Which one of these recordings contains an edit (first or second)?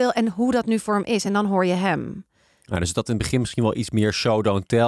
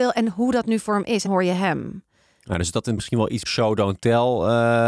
second